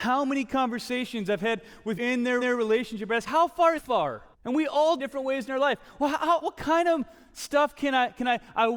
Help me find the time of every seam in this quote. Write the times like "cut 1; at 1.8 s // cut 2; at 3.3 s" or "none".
cut 1; at 2.0 s // cut 2; at 2.4 s // cut 3; at 3.3 s // cut 4; at 3.8 s // cut 5; at 4.3 s // cut 6; at 5.0 s // cut 7; at 6.4 s